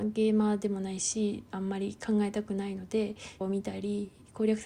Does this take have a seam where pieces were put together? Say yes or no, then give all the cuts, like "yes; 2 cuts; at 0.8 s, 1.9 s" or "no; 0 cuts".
yes; 1 cut; at 3.4 s